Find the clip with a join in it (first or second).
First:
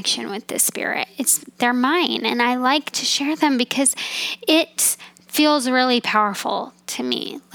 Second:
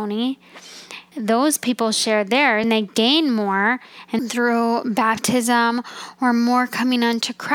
second